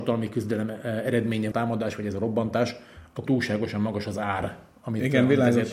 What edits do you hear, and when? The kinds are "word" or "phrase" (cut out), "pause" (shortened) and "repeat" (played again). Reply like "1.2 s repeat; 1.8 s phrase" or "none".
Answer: 1.5 s phrase; 3.3 s word